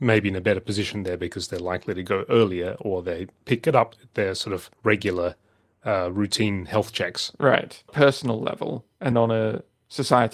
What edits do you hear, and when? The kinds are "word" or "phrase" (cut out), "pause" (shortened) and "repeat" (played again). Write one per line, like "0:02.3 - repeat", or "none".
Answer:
0:04.7 - pause
0:07.9 - phrase
0:09.1 - word